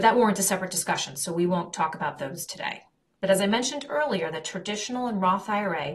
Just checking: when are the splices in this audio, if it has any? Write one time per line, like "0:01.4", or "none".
none

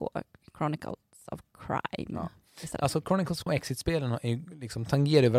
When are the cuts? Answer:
0:03.5

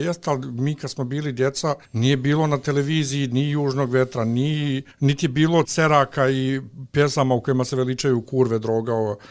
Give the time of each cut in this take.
0:01.9
0:04.9
0:05.6

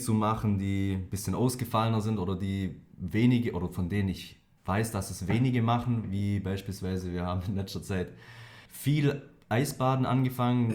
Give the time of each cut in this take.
0:02.9
0:08.7

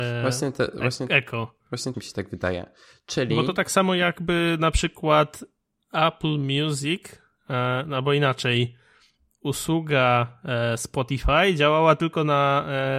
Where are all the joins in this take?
0:01.9

